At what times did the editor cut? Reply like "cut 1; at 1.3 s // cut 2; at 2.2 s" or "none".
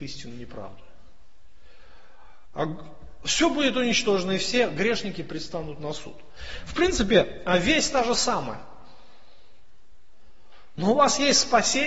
none